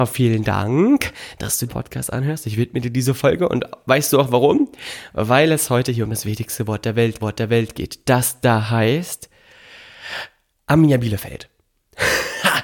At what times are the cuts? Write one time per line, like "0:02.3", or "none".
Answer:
0:01.7
0:07.2
0:10.5